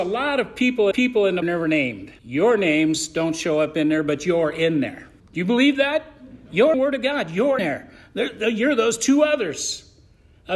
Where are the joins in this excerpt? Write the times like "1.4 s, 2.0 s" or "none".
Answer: 0.9 s, 1.4 s, 2.2 s, 5.2 s, 6.7 s, 7.6 s